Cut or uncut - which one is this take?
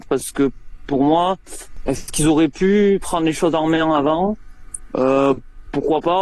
uncut